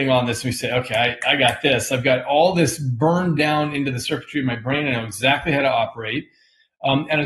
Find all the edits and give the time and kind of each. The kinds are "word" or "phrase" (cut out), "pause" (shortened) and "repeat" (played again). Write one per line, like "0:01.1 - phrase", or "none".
none